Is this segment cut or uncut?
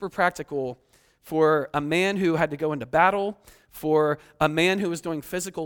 uncut